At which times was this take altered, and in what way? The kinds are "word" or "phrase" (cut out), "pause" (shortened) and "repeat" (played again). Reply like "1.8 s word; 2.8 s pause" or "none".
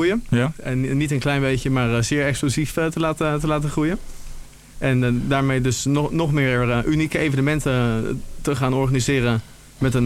none